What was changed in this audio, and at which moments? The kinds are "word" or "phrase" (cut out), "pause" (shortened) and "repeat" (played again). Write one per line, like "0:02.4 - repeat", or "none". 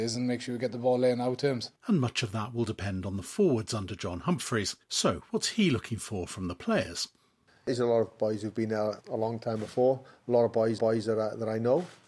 0:01.8 - pause
0:04.8 - pause
0:10.8 - repeat